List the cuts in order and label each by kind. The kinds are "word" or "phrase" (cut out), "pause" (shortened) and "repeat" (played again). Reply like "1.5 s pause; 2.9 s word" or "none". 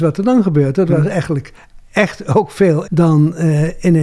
2.8 s word